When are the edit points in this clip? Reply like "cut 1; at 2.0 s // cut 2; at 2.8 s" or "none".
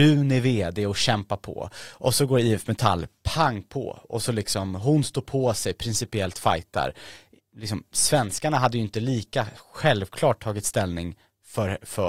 none